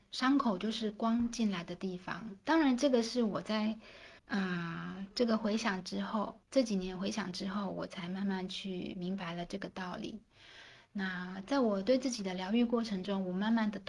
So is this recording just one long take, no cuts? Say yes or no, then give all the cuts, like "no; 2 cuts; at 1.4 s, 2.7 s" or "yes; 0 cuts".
no; 2 cuts; at 4.2 s, 6.4 s